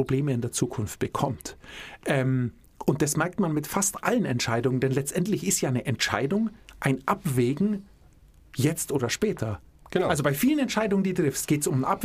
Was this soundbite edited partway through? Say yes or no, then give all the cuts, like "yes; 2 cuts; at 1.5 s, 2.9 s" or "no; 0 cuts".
no; 0 cuts